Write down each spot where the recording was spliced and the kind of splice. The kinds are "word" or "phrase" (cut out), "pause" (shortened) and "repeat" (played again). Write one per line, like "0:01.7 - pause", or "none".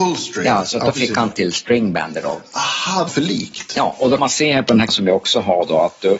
0:01.3 - word
0:03.1 - word
0:04.2 - word
0:04.9 - word